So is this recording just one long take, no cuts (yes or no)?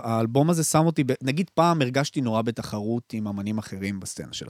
yes